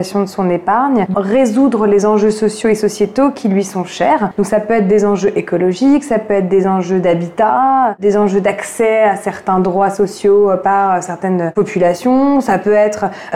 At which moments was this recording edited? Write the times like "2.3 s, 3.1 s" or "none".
1.1 s